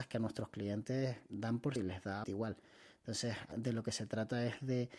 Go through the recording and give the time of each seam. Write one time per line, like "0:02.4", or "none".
0:01.8
0:02.2
0:03.5